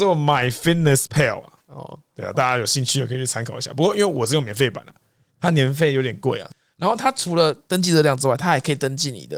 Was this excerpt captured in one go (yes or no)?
yes